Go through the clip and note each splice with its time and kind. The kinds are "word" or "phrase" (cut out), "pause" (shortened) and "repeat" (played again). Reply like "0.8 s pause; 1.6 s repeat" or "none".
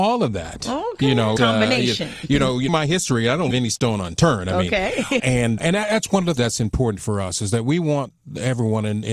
1.4 s word; 2.7 s word; 3.5 s word; 5.2 s word; 5.6 s word; 6.4 s word